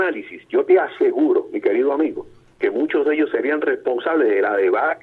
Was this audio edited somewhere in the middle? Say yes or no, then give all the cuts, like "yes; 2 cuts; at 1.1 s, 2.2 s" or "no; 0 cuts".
no; 0 cuts